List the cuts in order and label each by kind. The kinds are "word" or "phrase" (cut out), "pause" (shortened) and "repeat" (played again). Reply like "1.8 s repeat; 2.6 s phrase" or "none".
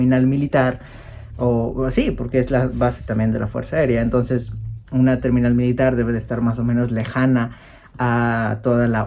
none